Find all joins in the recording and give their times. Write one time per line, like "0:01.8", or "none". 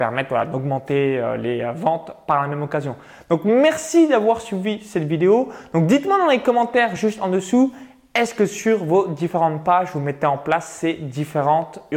none